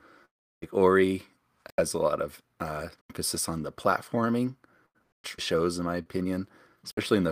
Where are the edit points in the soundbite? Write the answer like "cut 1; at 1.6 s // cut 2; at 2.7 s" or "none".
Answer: cut 1; at 3.0 s // cut 2; at 5.4 s

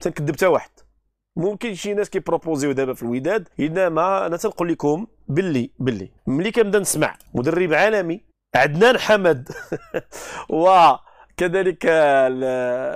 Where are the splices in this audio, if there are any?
cut 1; at 3.5 s // cut 2; at 6.2 s // cut 3; at 7.2 s // cut 4; at 8.3 s

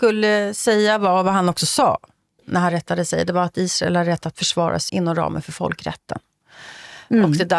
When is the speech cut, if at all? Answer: cut 1; at 2.4 s // cut 2; at 4.9 s

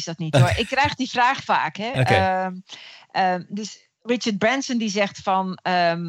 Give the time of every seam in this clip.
cut 1; at 1.4 s

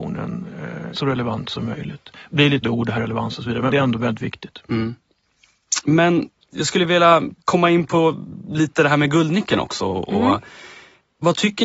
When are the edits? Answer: cut 1; at 0.9 s // cut 2; at 2.6 s // cut 3; at 3.0 s // cut 4; at 3.7 s

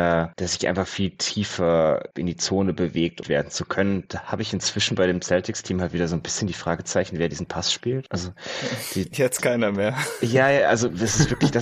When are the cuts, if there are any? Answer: cut 1; at 3.2 s

